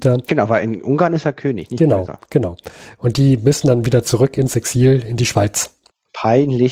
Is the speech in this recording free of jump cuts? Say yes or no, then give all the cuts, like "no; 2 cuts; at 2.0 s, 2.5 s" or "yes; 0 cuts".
yes; 0 cuts